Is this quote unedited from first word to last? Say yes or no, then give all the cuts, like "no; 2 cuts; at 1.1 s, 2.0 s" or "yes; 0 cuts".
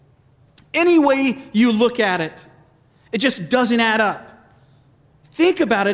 yes; 0 cuts